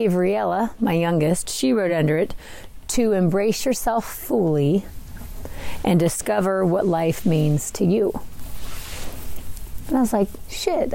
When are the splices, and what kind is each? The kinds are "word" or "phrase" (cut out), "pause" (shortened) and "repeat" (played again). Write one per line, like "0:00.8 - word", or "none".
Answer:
none

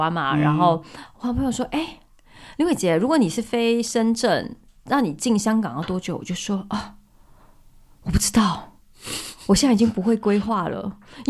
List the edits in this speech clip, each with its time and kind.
none

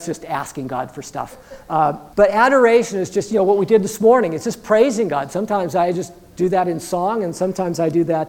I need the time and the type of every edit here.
0:02.1 - pause

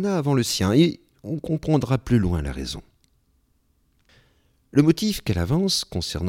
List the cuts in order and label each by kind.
none

